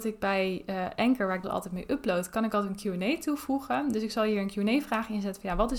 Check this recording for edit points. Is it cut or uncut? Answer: cut